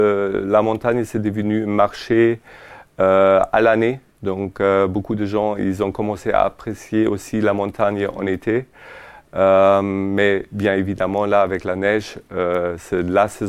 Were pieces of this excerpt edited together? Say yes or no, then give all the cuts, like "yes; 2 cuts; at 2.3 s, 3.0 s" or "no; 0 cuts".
no; 0 cuts